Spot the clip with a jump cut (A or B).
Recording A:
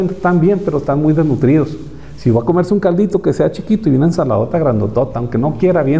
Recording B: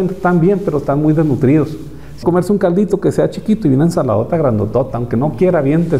B